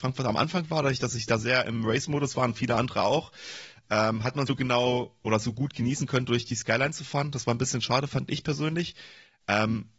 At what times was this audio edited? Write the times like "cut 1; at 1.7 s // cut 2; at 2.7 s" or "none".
cut 1; at 4.5 s